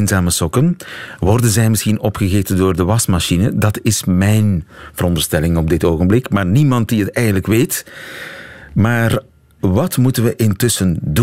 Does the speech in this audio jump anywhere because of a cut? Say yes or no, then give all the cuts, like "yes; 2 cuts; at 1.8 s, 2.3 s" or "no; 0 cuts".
no; 0 cuts